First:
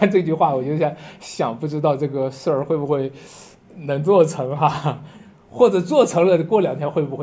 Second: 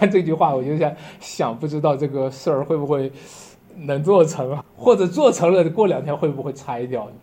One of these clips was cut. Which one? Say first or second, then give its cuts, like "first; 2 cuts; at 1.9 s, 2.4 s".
second; 1 cut; at 4.6 s